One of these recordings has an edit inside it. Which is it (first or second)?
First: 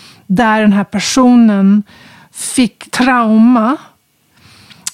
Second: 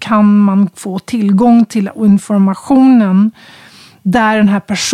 first